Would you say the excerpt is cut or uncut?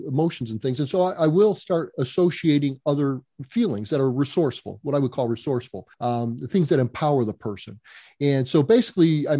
cut